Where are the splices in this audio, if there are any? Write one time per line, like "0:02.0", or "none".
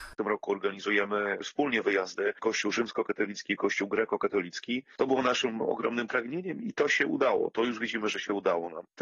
none